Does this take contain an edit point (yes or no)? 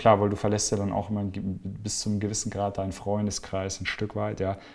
no